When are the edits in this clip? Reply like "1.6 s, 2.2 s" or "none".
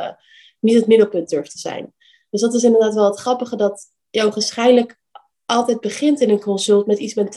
none